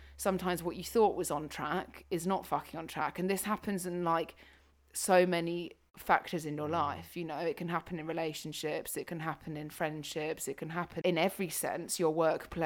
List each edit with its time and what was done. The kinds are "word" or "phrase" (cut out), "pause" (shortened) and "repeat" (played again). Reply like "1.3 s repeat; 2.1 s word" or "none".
11.0 s word